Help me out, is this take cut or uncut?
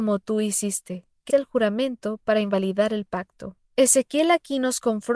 cut